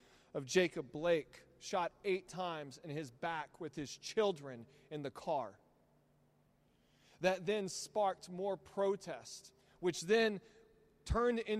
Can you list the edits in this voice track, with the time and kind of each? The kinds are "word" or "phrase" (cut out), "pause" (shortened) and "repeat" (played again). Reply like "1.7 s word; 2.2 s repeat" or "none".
none